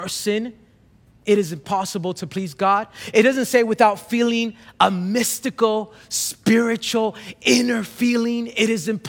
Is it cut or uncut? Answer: uncut